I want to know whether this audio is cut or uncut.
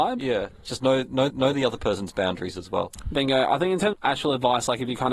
cut